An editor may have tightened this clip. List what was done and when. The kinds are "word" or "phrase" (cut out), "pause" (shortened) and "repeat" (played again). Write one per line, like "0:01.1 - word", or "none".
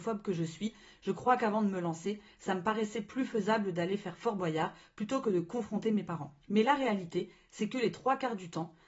0:06.4 - pause